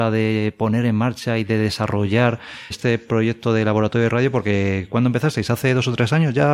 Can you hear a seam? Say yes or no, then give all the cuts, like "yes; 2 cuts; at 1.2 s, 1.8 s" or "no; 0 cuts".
yes; 1 cut; at 2.7 s